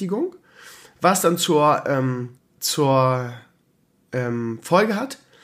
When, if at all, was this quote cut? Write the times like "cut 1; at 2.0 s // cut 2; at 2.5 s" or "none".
cut 1; at 2.4 s

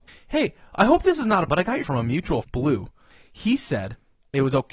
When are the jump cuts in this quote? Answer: cut 1; at 1.5 s // cut 2; at 1.8 s // cut 3; at 2.4 s

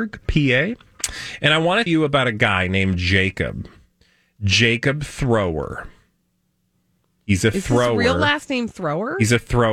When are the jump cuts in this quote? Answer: cut 1; at 1.9 s

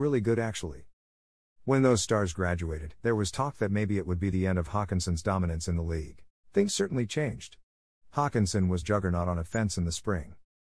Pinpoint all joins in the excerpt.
cut 1; at 3.0 s // cut 2; at 6.3 s // cut 3; at 8.8 s

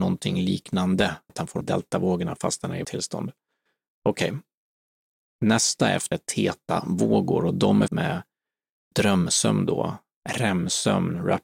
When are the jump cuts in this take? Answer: cut 1; at 1.3 s // cut 2; at 1.6 s // cut 3; at 2.8 s // cut 4; at 6.1 s // cut 5; at 7.9 s // cut 6; at 8.9 s

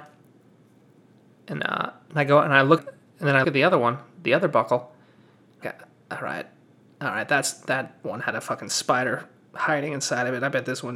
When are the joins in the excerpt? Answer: cut 1; at 1.6 s // cut 2; at 2.8 s // cut 3; at 3.4 s // cut 4; at 5.6 s

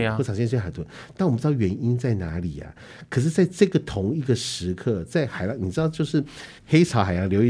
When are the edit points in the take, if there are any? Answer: cut 1; at 6.6 s

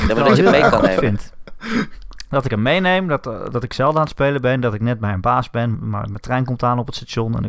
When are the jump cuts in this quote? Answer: cut 1; at 5.7 s

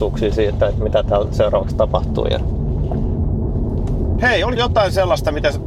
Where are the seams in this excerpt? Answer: cut 1; at 4.6 s

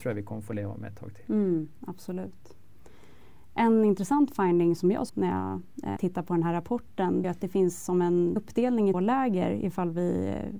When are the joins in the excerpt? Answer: cut 1; at 4.8 s // cut 2; at 5.1 s // cut 3; at 6.0 s // cut 4; at 7.2 s // cut 5; at 8.4 s // cut 6; at 8.9 s

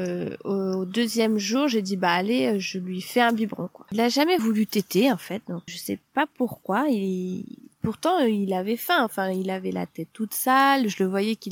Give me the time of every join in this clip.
cut 1; at 4.4 s // cut 2; at 5.7 s

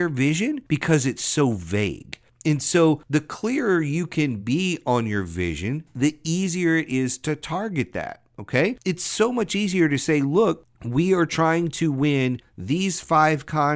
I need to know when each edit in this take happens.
none

